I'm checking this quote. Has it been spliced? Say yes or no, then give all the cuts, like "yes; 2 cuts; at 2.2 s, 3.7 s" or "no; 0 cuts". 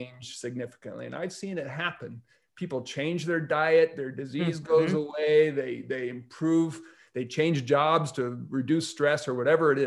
no; 0 cuts